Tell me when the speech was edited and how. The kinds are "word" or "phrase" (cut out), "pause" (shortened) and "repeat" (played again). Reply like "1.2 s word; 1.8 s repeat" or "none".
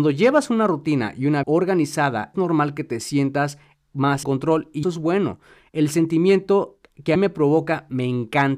1.4 s word; 2.3 s word; 4.2 s word; 4.8 s word; 7.1 s word